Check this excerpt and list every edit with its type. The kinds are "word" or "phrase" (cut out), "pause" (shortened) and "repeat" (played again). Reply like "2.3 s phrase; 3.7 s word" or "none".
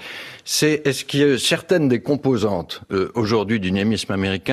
none